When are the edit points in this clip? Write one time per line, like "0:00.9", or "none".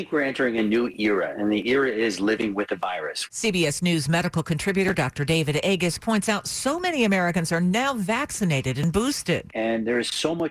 none